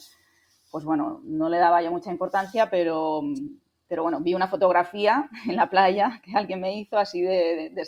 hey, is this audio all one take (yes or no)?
yes